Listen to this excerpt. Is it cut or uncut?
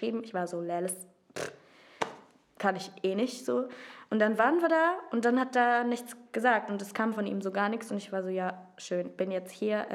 uncut